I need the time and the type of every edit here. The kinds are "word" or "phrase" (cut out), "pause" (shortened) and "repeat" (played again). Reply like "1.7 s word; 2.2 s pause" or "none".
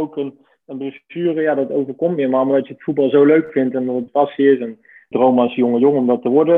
4.1 s phrase; 5.1 s word